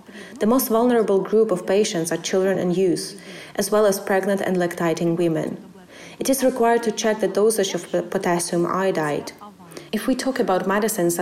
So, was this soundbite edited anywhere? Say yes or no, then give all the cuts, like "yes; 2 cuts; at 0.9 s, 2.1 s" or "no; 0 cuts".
no; 0 cuts